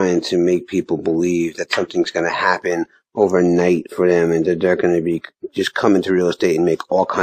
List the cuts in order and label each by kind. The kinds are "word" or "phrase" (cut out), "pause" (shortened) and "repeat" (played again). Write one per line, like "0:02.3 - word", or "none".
none